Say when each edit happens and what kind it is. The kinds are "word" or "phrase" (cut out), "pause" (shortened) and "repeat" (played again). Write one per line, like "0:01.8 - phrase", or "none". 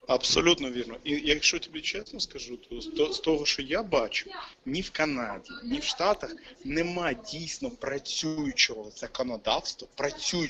none